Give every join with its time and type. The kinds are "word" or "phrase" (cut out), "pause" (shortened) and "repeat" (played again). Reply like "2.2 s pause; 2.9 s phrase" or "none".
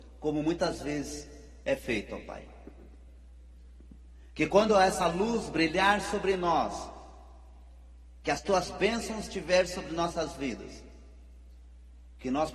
none